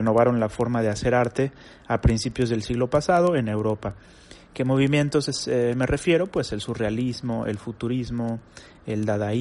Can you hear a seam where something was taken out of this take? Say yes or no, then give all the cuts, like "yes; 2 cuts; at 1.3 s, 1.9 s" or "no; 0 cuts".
no; 0 cuts